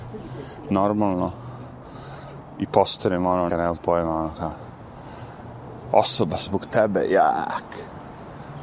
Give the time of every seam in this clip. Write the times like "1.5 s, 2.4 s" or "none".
3.5 s, 6.5 s